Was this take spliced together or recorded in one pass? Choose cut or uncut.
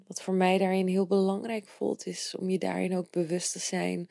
uncut